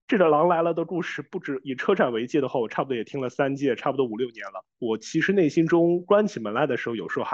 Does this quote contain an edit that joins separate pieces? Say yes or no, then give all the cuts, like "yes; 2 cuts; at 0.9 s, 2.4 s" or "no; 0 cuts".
yes; 1 cut; at 4.7 s